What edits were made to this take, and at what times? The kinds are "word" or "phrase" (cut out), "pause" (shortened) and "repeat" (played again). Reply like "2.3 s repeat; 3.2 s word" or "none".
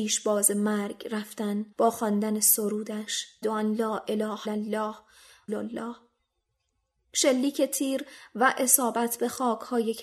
1.7 s pause; 3.4 s word; 4.5 s word; 5.5 s phrase